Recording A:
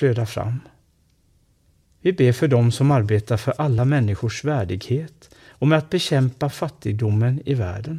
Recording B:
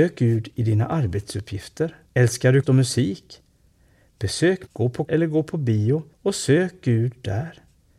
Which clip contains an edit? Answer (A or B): B